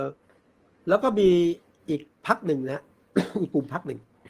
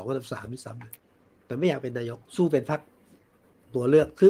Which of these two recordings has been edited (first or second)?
second